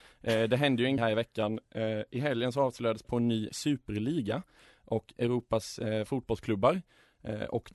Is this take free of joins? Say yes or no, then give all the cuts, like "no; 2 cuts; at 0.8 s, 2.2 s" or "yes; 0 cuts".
no; 4 cuts; at 1.0 s, 3.0 s, 3.5 s, 6.1 s